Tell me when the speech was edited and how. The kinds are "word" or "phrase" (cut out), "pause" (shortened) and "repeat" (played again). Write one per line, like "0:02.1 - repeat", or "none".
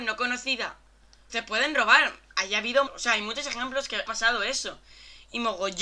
0:01.3 - word
0:02.9 - word
0:04.1 - word

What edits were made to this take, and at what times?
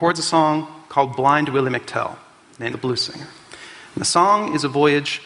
0:02.7 - word

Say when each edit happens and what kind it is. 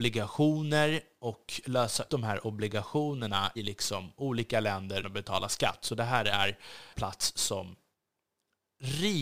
0:02.1 - word
0:03.6 - word
0:05.0 - word
0:06.9 - word

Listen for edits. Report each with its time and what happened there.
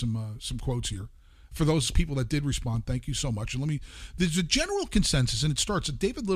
none

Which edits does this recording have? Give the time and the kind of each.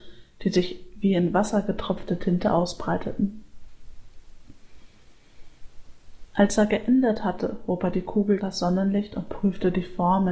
0:08.4 - word

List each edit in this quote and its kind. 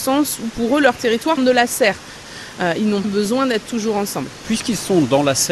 0:01.4 - phrase
0:03.0 - word
0:03.6 - word

